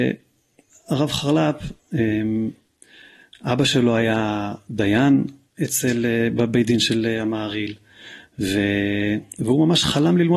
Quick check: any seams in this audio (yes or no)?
no